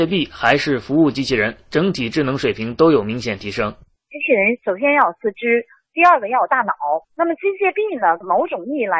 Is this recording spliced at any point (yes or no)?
yes